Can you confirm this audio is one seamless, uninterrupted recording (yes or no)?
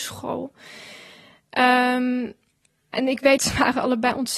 no